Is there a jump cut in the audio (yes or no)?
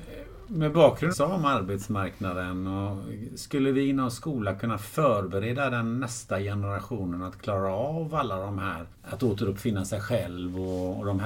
yes